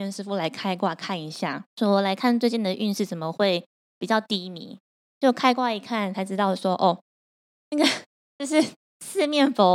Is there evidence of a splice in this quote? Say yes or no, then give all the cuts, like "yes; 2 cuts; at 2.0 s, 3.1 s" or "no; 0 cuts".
yes; 1 cut; at 1.7 s